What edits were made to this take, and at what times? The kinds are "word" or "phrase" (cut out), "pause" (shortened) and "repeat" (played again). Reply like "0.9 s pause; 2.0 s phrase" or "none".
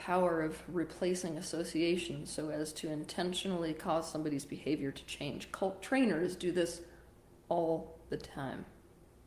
none